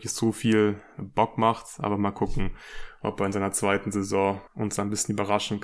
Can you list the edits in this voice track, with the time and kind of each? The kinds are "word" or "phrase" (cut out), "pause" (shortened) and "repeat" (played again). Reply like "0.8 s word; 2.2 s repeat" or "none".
none